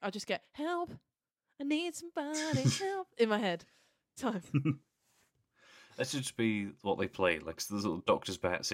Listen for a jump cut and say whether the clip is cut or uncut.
cut